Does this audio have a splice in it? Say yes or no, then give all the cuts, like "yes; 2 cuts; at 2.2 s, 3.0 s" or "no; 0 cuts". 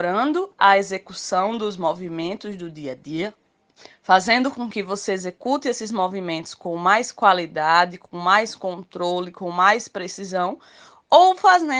no; 0 cuts